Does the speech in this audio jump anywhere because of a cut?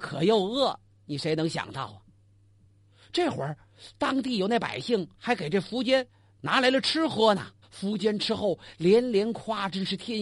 yes; 2 cuts; at 5.1 s, 7.6 s

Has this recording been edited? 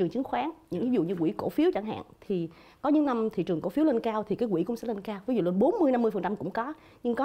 no; 0 cuts

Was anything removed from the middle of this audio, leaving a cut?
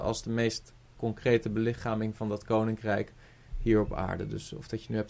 no; 0 cuts

